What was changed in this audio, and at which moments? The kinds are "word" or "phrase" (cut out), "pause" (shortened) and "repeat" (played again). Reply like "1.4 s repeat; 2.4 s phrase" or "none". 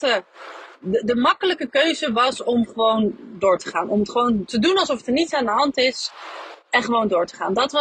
1.0 s word

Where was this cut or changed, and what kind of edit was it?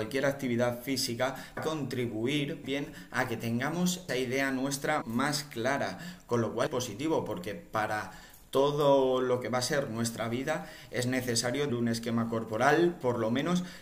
1.6 s word; 2.6 s word; 4.1 s word; 5.0 s word; 6.7 s word; 11.7 s word

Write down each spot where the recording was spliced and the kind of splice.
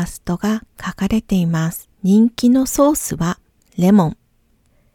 1.9 s pause

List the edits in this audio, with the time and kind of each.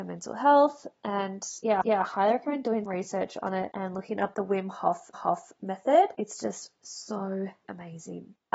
1.8 s repeat; 2.9 s word; 5.1 s repeat; 7.6 s word

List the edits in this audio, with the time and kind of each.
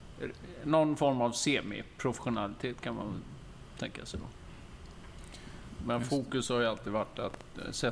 none

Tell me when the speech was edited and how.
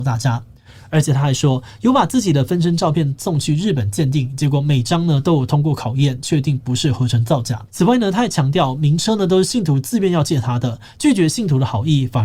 7.7 s pause

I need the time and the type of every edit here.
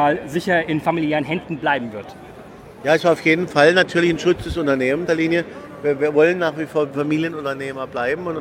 5.1 s phrase

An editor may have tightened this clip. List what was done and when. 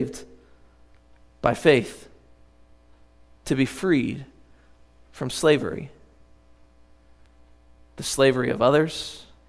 none

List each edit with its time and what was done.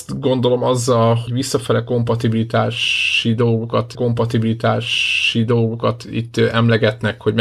1.3 s word; 3.9 s repeat

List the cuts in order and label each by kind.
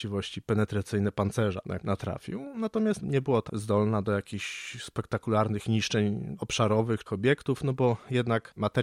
1.8 s word; 3.5 s word; 7.1 s phrase

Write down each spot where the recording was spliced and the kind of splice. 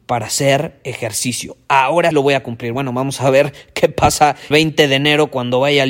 2.1 s word; 4.5 s word

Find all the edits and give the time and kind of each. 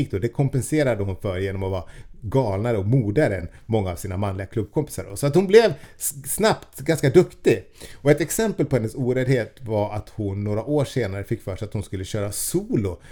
none

